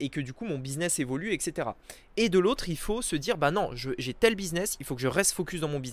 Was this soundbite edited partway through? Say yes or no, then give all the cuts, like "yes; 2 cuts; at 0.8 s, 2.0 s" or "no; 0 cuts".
no; 0 cuts